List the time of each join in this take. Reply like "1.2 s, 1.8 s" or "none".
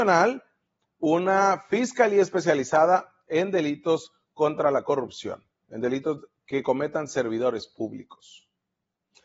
none